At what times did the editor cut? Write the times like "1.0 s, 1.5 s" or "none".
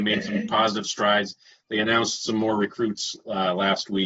none